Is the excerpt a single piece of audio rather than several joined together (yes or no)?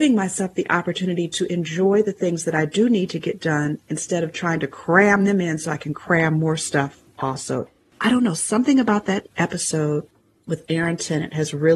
yes